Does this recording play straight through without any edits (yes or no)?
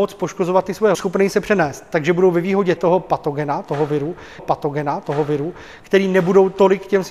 no